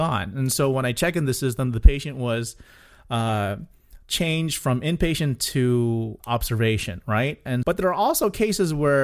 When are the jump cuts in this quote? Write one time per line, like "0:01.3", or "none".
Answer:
0:04.0
0:06.2
0:07.6